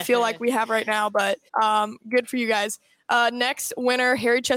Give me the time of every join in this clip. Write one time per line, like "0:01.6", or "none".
0:01.5